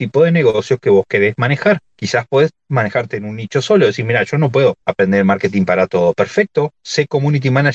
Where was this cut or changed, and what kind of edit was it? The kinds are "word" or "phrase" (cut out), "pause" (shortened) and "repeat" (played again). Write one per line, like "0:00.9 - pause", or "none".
0:04.8 - pause

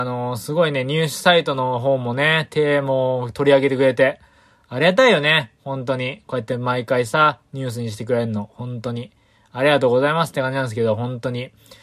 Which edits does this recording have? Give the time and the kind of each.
none

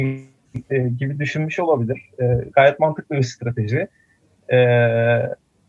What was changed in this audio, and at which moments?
none

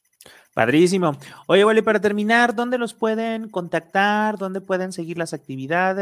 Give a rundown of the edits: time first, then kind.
none

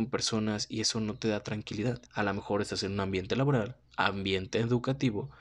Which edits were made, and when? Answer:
0:02.1 - pause
0:03.8 - pause

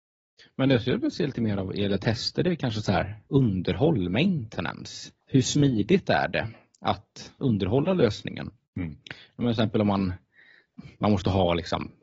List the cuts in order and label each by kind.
0:03.2 - pause
0:05.2 - pause
0:07.4 - pause
0:08.6 - pause
0:10.9 - pause

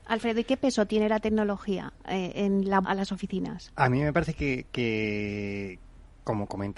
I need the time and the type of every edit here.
0:02.8 - phrase

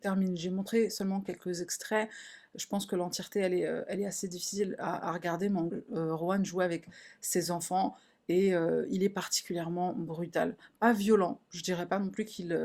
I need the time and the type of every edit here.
0:05.7 - phrase

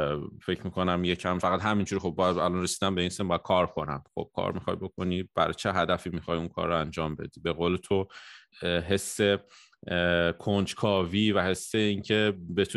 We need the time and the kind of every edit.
0:01.4 - word
0:08.5 - word

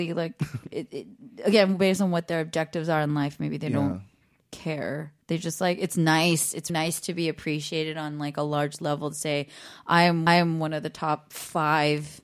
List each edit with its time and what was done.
0:05.2 - pause
0:06.7 - word
0:10.3 - repeat

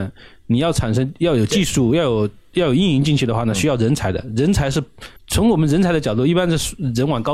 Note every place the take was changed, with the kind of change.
0:05.2 - pause

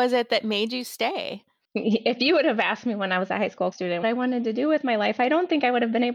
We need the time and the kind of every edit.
0:03.7 - word
0:04.0 - word

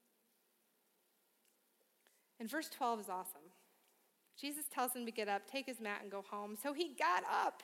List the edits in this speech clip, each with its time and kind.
0:04.1 - pause

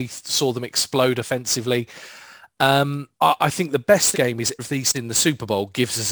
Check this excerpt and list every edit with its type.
0:03.1 - pause
0:04.1 - phrase
0:04.6 - word
0:04.9 - word

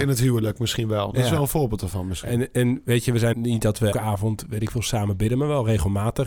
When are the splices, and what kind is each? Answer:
0:03.3 - word
0:03.9 - word

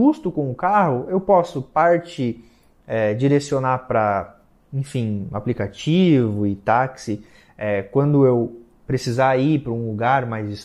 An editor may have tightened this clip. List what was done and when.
none

